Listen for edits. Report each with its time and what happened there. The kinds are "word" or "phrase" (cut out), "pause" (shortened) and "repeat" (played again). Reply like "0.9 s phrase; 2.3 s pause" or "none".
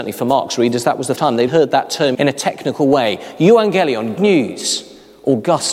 1.2 s word; 1.5 s word; 2.1 s word; 4.2 s word

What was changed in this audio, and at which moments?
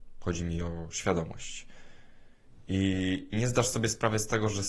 3.3 s word

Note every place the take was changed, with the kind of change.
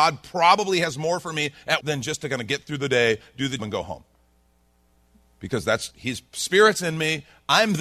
1.8 s word; 3.6 s word; 5.9 s word

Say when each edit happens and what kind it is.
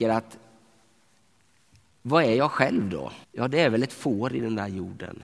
3.2 s pause

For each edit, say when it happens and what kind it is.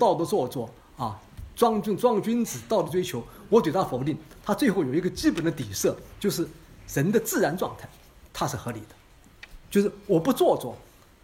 8.3 s pause; 9.6 s pause

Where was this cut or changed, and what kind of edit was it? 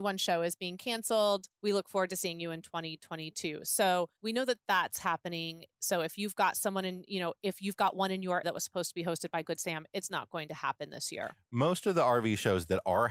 1.5 s pause; 4.2 s pause; 8.4 s word

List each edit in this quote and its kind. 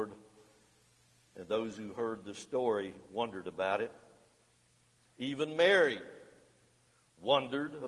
none

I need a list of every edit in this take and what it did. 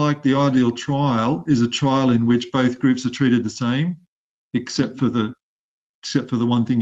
none

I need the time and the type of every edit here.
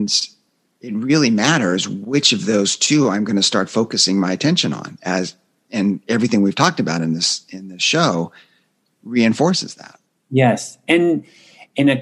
none

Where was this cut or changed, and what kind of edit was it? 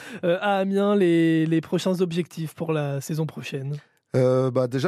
none

